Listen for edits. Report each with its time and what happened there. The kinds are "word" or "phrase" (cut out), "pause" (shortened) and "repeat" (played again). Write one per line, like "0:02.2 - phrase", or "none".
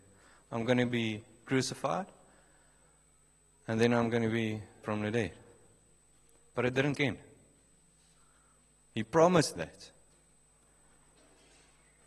0:04.8 - word
0:06.9 - word
0:09.6 - word